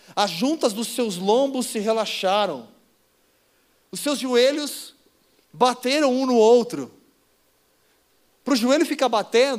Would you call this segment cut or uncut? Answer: uncut